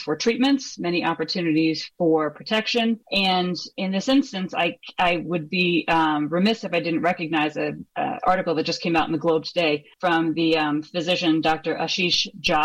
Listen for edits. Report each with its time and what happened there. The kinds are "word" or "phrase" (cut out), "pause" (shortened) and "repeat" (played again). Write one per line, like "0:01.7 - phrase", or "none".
0:03.0 - pause
0:07.9 - pause
0:09.9 - pause